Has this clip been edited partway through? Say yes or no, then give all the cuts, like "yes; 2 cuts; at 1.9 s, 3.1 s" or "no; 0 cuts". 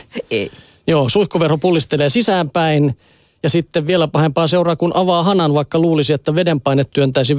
no; 0 cuts